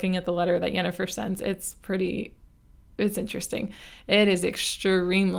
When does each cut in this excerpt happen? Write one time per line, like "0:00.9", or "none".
none